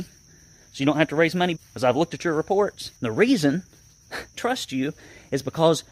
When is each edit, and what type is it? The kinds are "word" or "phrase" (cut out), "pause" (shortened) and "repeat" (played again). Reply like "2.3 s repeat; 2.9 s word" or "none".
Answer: 1.5 s phrase; 3.0 s pause; 4.3 s word